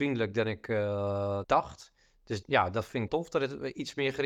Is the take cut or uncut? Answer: cut